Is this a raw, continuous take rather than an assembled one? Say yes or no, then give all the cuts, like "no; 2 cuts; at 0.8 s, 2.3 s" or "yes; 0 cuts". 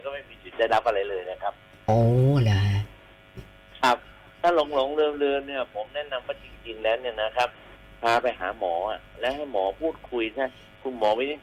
yes; 0 cuts